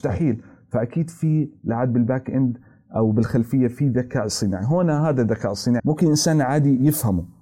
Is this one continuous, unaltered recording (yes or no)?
no